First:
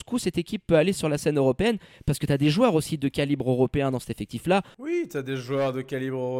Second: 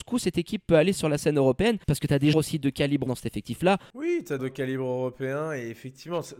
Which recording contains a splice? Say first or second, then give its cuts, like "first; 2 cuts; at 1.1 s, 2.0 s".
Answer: second; 4 cuts; at 1.8 s, 2.3 s, 3.1 s, 4.4 s